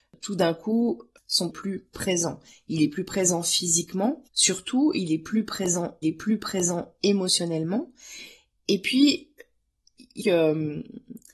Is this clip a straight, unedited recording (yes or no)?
no